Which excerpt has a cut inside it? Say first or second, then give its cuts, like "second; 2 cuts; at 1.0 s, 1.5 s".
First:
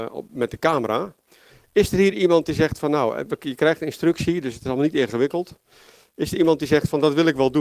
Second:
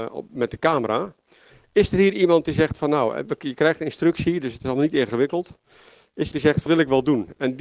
second; 2 cuts; at 6.3 s, 6.7 s